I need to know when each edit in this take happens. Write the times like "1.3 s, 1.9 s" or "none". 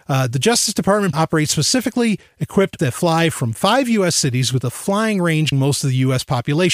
1.1 s, 2.8 s, 5.5 s